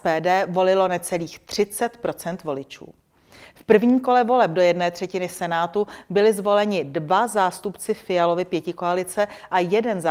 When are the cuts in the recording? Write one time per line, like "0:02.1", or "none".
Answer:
none